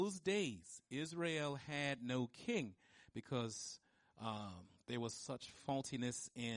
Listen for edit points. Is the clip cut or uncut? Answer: uncut